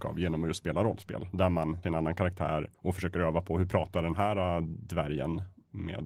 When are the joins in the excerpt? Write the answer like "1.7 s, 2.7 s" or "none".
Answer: 1.8 s, 2.7 s

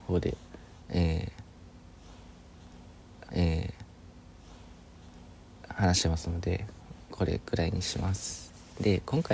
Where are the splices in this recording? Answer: 3.3 s

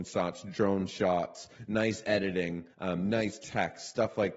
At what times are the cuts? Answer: 2.7 s

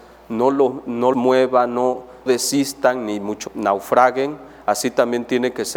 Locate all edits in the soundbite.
1.1 s, 2.3 s, 3.5 s

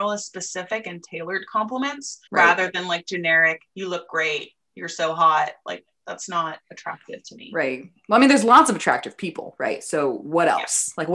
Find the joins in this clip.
2.3 s, 3.7 s

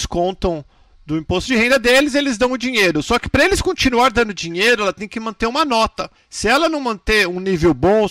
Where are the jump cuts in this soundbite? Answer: 6.2 s

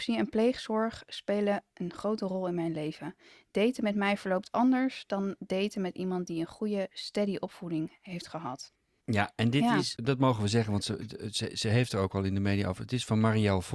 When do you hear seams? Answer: none

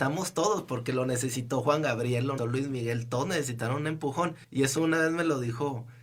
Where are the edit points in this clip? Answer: 2.4 s, 4.4 s

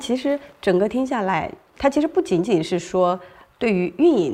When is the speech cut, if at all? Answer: none

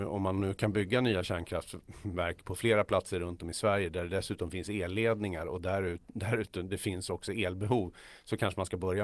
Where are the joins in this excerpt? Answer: none

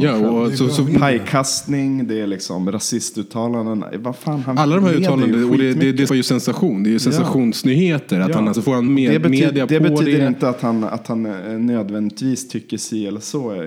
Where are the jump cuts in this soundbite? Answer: 6.1 s, 8.5 s, 8.9 s

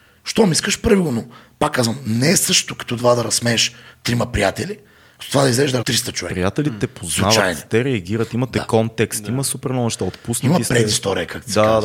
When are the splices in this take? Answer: 5.8 s

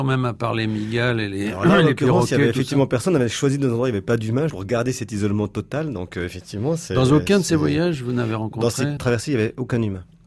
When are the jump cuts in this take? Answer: 4.5 s, 9.0 s

